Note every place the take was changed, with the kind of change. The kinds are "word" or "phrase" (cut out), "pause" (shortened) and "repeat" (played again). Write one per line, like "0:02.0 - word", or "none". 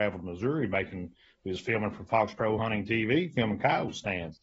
none